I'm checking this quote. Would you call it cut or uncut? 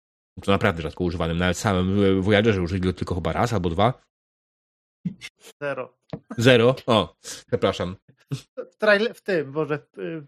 cut